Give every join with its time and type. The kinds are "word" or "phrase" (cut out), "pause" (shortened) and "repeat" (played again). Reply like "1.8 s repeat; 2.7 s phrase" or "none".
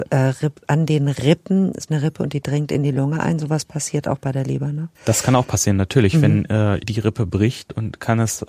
1.9 s word; 4.9 s pause; 6.8 s phrase

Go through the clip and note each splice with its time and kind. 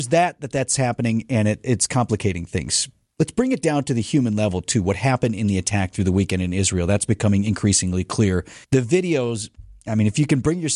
8.6 s pause

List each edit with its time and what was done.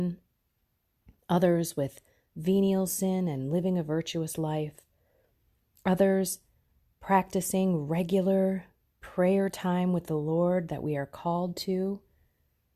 none

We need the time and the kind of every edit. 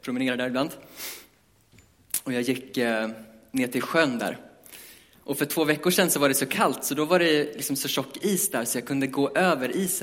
none

